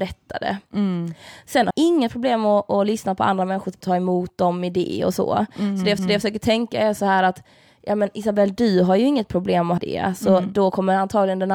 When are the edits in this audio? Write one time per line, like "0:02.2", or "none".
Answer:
0:01.7
0:03.8
0:06.0
0:09.8